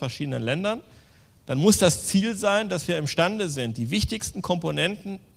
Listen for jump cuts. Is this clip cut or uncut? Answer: uncut